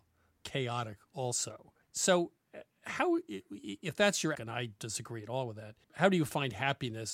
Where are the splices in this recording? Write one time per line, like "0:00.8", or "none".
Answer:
0:01.8
0:04.3
0:04.8
0:05.8